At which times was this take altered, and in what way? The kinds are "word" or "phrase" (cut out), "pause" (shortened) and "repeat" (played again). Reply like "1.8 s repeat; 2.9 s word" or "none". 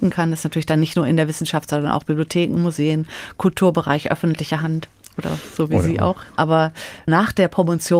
none